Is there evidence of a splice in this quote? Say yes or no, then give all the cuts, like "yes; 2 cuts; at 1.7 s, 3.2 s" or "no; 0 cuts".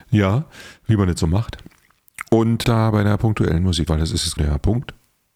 yes; 3 cuts; at 2.6 s, 3.9 s, 4.4 s